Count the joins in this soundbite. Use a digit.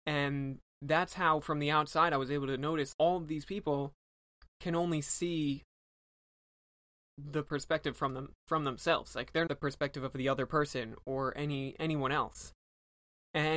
2